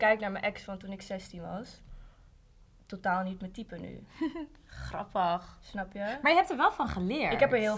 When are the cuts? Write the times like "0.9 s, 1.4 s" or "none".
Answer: none